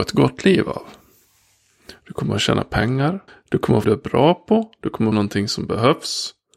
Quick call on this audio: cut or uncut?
cut